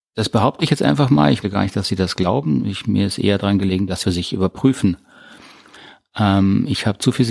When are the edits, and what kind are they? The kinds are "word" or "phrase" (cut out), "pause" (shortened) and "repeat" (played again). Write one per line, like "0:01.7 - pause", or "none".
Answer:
0:01.4 - word
0:04.0 - word